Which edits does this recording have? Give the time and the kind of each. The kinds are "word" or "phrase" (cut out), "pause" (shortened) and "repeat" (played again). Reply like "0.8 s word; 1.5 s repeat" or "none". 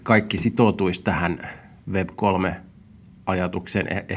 none